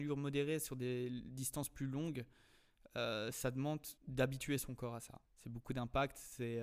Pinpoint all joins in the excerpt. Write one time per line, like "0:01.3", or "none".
0:04.0
0:05.3